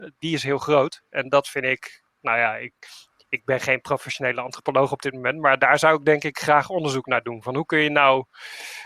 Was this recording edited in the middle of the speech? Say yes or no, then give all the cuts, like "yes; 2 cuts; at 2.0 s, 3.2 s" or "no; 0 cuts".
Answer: no; 0 cuts